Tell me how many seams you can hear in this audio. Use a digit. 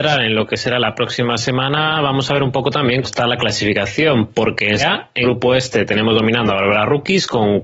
3